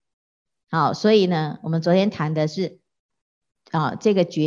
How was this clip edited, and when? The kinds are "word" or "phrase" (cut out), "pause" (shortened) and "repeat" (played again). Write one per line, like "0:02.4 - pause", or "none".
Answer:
none